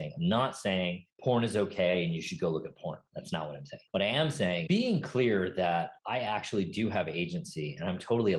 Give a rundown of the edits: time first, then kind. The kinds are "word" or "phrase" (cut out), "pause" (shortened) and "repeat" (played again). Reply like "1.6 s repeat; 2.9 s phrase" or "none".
1.1 s pause; 3.9 s pause; 4.7 s word; 6.0 s pause